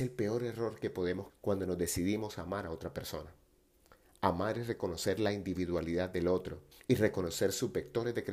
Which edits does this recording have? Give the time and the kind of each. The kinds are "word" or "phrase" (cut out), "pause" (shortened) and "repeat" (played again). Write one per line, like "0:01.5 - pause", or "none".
0:01.3 - word
0:06.7 - pause